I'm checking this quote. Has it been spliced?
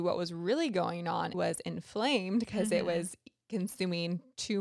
yes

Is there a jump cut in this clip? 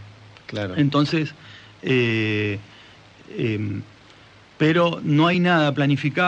no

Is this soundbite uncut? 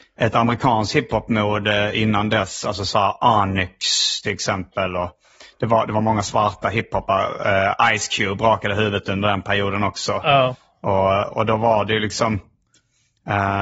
yes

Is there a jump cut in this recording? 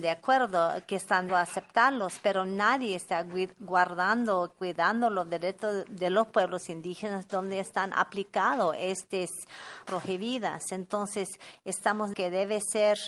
yes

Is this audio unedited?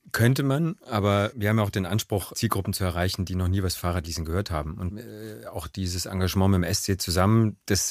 no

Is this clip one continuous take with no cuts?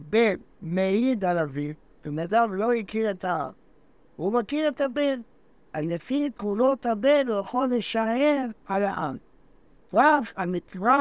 yes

